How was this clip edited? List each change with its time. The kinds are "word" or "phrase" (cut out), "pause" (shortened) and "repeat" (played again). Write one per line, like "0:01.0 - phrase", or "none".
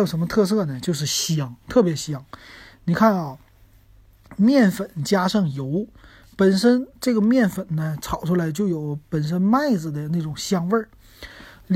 none